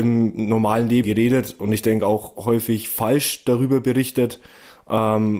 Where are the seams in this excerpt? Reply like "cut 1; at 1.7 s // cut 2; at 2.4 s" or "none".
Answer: cut 1; at 1.0 s